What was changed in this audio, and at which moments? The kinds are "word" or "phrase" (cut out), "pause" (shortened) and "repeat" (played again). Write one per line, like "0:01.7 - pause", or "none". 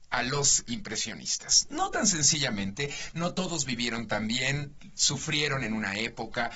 none

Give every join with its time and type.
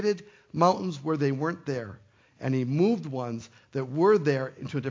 none

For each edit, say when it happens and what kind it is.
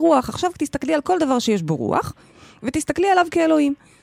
none

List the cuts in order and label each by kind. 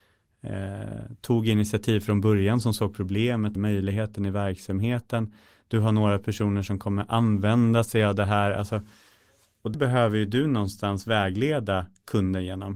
0:03.5 - word
0:09.7 - word

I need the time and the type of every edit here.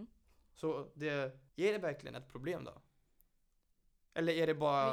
0:01.5 - pause

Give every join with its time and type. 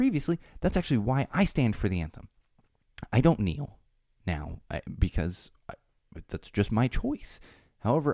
none

